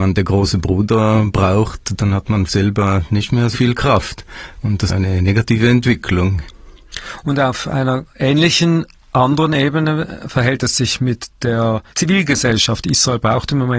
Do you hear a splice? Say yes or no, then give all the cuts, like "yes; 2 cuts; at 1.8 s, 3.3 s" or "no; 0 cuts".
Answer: yes; 5 cuts; at 2.5 s, 3.5 s, 4.9 s, 8.1 s, 11.9 s